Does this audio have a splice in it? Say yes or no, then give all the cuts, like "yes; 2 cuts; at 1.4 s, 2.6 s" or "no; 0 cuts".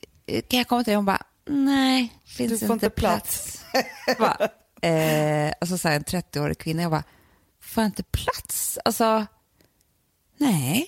yes; 2 cuts; at 2.2 s, 4.2 s